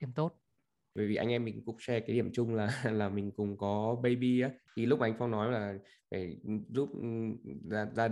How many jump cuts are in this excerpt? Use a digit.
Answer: 0